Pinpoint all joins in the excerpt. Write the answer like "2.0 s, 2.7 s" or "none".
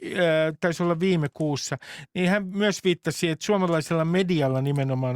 none

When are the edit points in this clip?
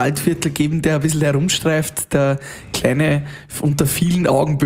none

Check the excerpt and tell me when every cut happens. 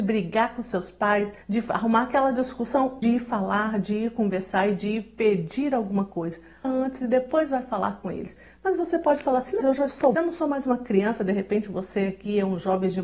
1.4 s, 3.0 s, 6.6 s, 9.6 s, 10.1 s

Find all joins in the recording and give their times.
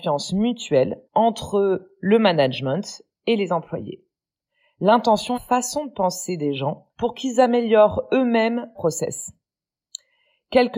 1.0 s, 5.3 s, 6.9 s, 8.7 s

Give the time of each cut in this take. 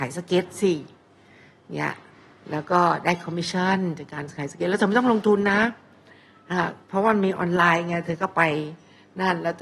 none

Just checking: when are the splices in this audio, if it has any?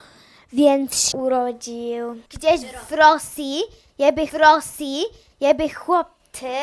1.1 s, 2.3 s, 4.3 s

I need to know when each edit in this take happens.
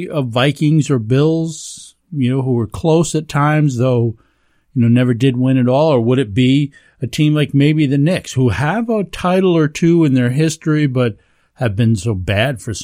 none

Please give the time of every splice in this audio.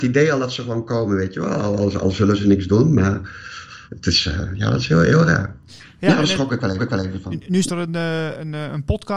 3.9 s, 6.8 s, 7.7 s

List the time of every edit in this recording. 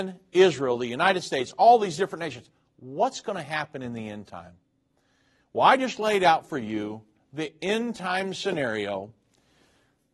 none

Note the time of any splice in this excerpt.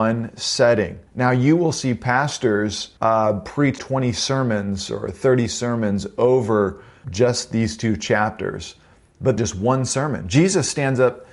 1.1 s, 3.0 s, 3.8 s, 7.0 s, 9.4 s

